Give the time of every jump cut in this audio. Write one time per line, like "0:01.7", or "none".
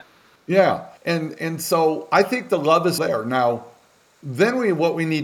0:01.0
0:03.0